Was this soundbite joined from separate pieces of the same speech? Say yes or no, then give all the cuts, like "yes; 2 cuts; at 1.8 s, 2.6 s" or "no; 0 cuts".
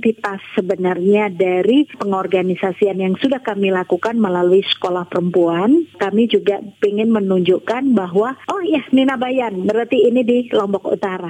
no; 0 cuts